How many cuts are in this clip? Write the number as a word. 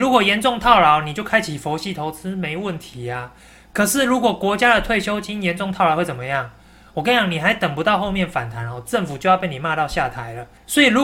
zero